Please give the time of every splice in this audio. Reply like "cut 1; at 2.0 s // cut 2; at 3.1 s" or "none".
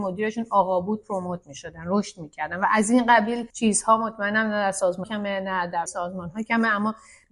cut 1; at 3.5 s // cut 2; at 5.0 s // cut 3; at 5.9 s